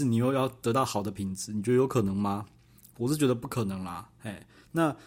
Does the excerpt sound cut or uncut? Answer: uncut